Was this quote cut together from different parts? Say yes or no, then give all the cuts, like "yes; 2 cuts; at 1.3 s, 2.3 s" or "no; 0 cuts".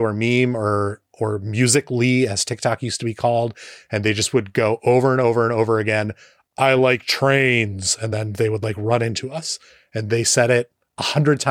no; 0 cuts